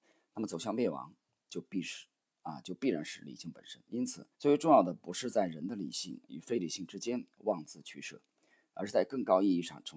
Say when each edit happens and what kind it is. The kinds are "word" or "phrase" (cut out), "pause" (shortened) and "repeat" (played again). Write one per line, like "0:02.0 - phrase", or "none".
0:04.3 - pause

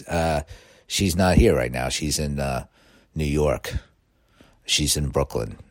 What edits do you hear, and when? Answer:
none

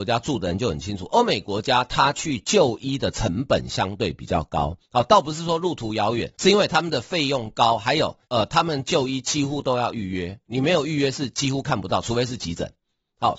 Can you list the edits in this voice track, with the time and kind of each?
0:04.8 - pause
0:06.3 - pause
0:08.2 - pause

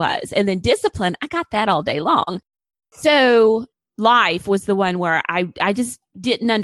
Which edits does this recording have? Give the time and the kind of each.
none

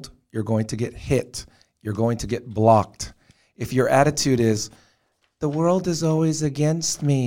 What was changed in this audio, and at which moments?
none

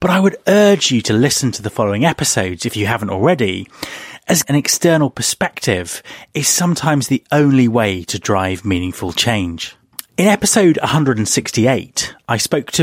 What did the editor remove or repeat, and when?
0:04.4 - word

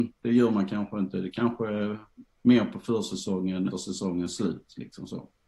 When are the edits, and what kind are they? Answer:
0:02.3 - pause
0:03.7 - phrase

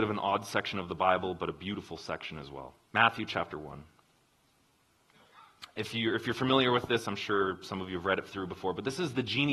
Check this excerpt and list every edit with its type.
0:02.8 - pause

